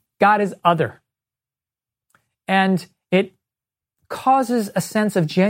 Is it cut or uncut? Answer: uncut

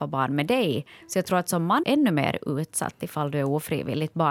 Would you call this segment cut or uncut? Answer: cut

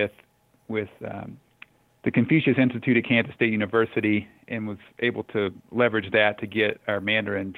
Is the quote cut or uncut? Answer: cut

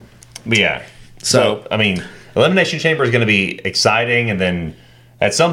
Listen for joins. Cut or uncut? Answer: uncut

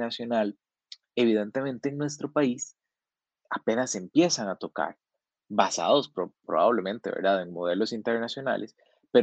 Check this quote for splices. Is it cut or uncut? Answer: uncut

